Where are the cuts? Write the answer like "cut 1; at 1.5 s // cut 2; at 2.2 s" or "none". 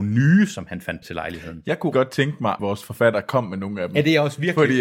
cut 1; at 1.0 s // cut 2; at 1.9 s // cut 3; at 2.6 s